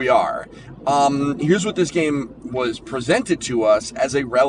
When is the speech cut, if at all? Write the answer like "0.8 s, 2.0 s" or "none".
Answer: none